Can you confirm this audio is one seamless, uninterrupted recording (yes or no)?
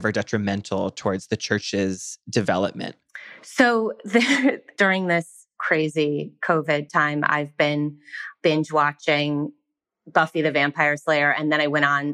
yes